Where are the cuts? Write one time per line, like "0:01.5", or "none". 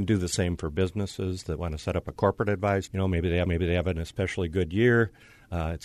0:02.9
0:03.5